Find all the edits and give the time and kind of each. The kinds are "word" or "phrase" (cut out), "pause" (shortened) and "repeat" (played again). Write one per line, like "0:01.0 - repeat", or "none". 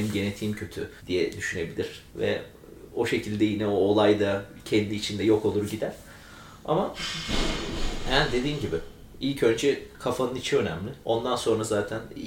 0:01.0 - pause
0:02.1 - pause
0:11.0 - pause